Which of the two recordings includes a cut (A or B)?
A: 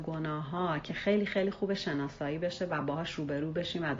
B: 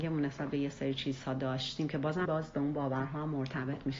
B